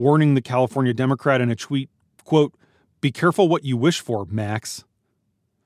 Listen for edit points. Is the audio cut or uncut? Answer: uncut